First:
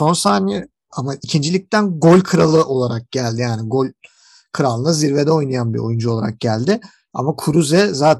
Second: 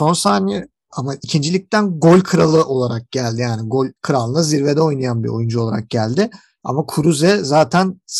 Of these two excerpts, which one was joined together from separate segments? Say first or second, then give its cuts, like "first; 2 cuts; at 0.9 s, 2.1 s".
second; 1 cut; at 4.0 s